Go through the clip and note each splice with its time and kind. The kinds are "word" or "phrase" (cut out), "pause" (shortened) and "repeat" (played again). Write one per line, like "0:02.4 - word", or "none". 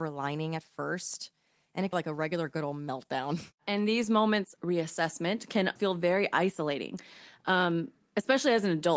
0:01.9 - word
0:04.6 - word
0:05.8 - word

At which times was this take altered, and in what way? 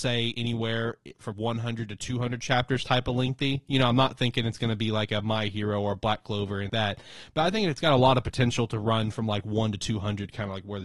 0:01.3 - word
0:06.7 - word

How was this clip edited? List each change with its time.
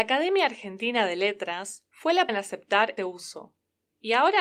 0:01.9 - pause
0:02.3 - word
0:03.0 - word

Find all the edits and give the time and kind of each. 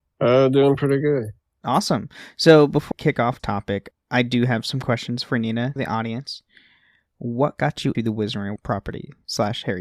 0:02.9 - word
0:03.4 - word
0:03.9 - word
0:05.8 - word
0:07.9 - word
0:08.6 - word

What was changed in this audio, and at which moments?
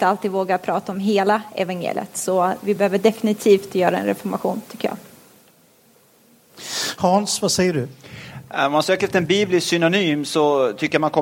none

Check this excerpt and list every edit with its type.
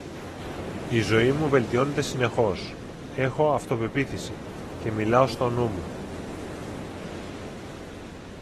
none

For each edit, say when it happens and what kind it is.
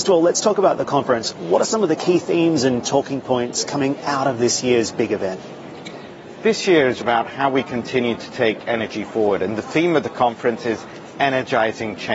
0:07.0 - word

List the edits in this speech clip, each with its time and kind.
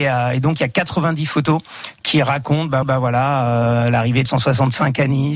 0:02.8 - repeat
0:04.3 - word

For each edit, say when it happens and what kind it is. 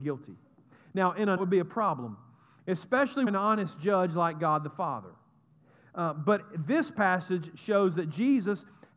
0:01.4 - phrase
0:03.3 - phrase

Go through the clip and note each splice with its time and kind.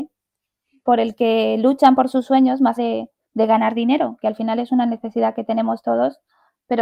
0:02.8 - word
0:03.2 - pause

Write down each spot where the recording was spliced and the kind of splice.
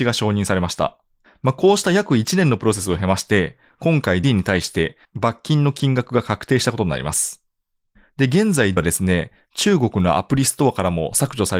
0:04.2 - word
0:08.8 - word

